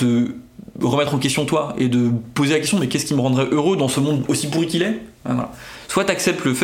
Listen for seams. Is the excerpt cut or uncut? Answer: uncut